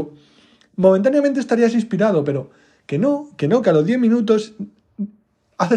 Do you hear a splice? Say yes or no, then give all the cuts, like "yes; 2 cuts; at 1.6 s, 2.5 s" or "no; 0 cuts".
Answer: no; 0 cuts